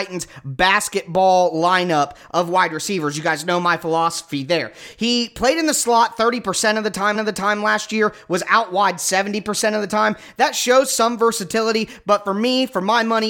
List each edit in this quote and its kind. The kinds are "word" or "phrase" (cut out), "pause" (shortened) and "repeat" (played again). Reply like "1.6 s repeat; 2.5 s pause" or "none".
7.1 s repeat